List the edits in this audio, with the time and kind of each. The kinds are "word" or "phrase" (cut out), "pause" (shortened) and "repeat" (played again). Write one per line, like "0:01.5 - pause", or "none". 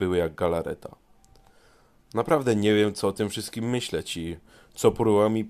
none